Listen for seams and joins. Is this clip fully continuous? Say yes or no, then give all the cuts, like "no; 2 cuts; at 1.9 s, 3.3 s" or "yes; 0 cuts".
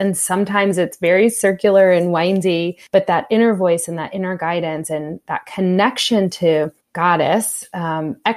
no; 2 cuts; at 2.9 s, 6.8 s